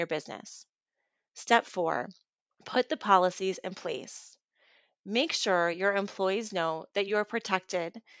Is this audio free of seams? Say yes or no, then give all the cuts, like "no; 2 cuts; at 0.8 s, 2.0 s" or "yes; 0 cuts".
yes; 0 cuts